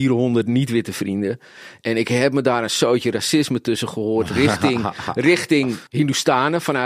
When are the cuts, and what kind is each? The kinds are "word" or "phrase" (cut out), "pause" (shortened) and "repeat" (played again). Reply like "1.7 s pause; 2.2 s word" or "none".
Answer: 5.9 s pause